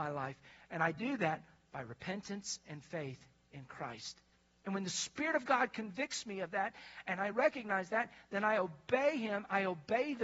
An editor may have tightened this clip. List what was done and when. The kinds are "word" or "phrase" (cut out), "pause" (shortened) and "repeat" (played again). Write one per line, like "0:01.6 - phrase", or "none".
none

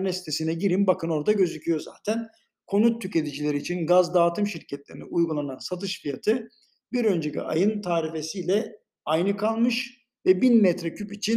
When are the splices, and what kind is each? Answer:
none

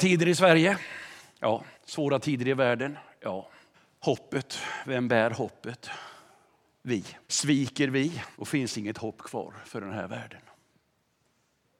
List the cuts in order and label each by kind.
0:01.7 - pause
0:03.7 - pause
0:07.2 - pause
0:08.3 - pause

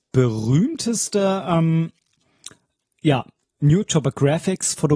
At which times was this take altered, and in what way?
none

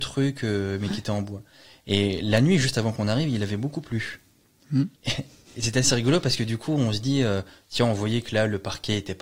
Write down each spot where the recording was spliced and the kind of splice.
0:04.9 - pause

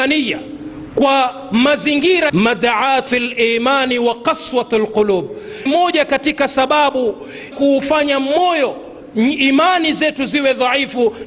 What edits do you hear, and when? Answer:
0:02.3 - phrase
0:03.1 - word
0:05.7 - word
0:07.5 - word

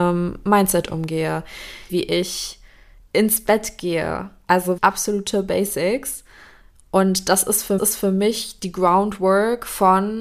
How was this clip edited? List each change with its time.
0:01.9 - phrase
0:04.8 - word
0:07.8 - repeat

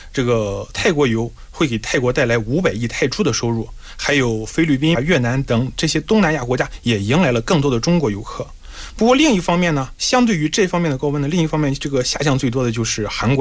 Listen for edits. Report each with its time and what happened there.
0:04.9 - phrase

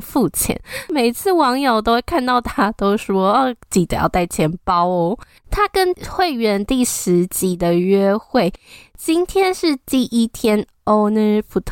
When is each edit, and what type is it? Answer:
0:05.4 - pause

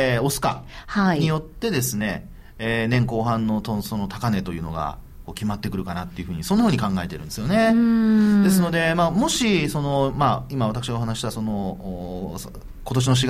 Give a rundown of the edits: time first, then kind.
none

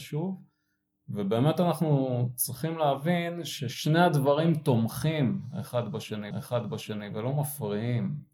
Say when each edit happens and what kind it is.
0:06.3 - repeat

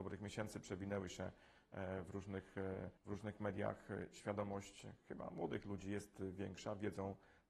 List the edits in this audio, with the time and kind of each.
0:03.0 - pause

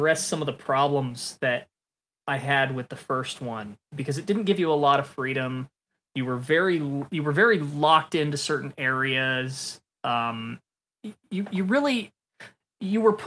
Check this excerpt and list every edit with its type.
0:03.8 - pause

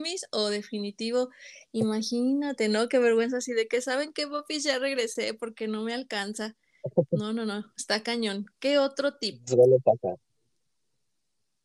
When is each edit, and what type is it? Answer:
none

